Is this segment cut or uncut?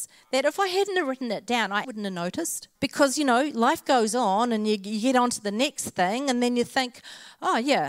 cut